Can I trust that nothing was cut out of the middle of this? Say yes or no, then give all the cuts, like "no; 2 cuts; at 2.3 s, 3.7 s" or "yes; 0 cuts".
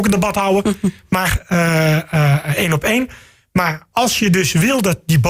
yes; 0 cuts